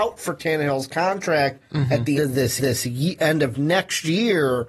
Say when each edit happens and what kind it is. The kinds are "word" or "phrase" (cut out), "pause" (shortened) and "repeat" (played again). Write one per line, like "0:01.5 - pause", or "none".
0:02.2 - word
0:02.6 - repeat